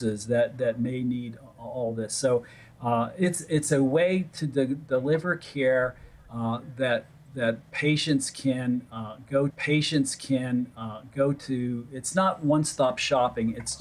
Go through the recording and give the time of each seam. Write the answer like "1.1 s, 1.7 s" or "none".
9.5 s